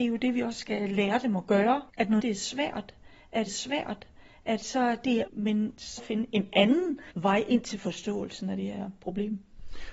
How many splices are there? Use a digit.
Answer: 6